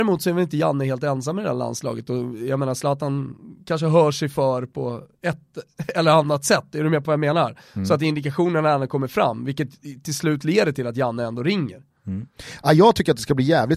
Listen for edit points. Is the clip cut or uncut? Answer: cut